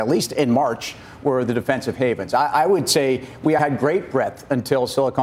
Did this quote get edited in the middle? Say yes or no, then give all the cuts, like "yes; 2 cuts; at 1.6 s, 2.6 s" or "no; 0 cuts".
yes; 1 cut; at 3.6 s